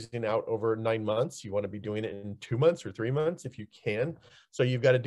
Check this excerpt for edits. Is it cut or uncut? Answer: uncut